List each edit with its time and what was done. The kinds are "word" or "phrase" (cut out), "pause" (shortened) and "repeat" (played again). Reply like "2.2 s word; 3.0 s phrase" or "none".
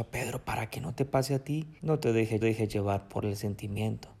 1.8 s pause; 2.4 s repeat